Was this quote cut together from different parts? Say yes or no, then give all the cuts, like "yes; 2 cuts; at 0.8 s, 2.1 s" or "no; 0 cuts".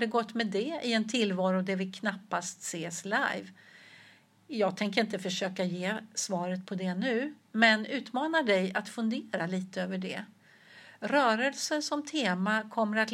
no; 0 cuts